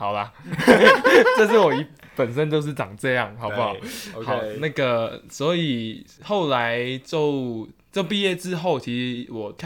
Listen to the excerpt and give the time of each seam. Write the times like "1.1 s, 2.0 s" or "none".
none

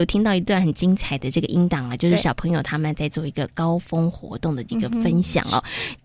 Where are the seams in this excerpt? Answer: none

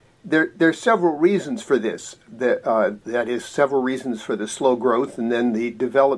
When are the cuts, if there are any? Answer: 3.0 s

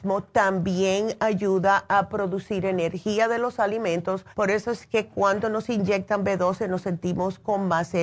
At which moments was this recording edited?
4.3 s

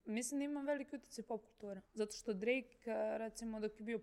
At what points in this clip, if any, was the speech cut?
1.8 s

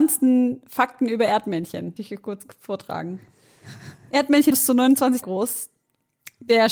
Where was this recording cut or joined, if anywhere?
2.0 s, 4.5 s, 5.2 s

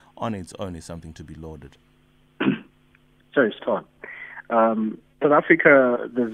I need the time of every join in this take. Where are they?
1.8 s, 3.6 s, 5.2 s

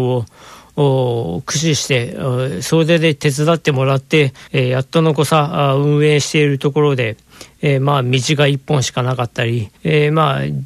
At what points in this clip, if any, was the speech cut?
4.5 s, 9.8 s

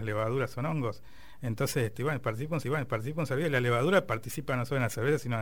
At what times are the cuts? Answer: 2.6 s

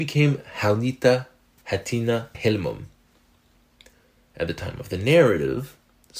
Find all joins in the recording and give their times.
1.6 s, 2.3 s

